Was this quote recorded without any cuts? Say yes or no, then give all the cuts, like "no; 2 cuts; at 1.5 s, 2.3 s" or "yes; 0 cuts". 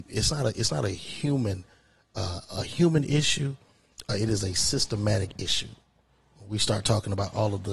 yes; 0 cuts